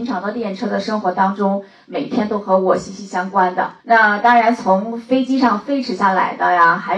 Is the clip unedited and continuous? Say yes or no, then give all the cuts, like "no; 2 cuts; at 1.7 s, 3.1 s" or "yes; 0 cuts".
no; 1 cut; at 3.8 s